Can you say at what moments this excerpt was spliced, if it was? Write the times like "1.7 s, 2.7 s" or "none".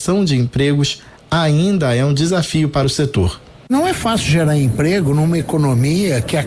none